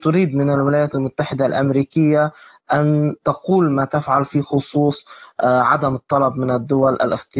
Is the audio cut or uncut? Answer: uncut